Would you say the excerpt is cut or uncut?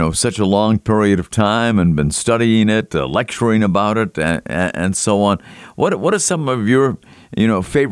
uncut